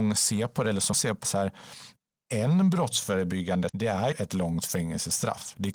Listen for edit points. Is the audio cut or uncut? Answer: cut